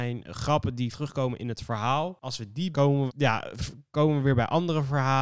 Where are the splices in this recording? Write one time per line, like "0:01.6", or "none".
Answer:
0:00.9
0:02.7
0:03.1